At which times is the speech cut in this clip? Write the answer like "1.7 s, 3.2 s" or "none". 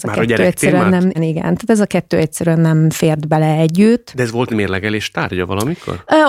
1.1 s, 4.5 s